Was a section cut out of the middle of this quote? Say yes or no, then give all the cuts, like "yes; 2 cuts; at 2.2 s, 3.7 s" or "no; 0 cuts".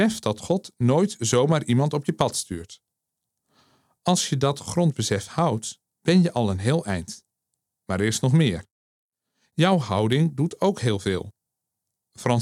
no; 0 cuts